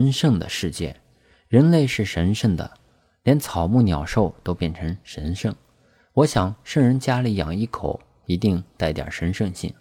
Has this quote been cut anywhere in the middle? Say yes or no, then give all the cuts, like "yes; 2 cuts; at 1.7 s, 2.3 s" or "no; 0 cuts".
no; 0 cuts